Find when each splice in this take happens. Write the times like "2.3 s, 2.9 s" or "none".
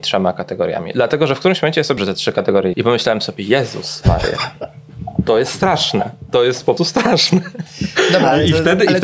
2.0 s, 2.7 s, 6.8 s